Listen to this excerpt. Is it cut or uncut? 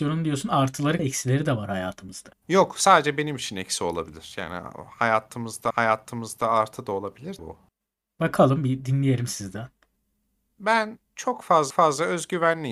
cut